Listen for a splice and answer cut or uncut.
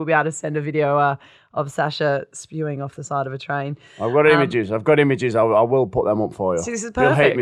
uncut